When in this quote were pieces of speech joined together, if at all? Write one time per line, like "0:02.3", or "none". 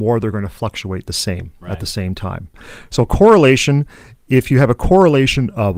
none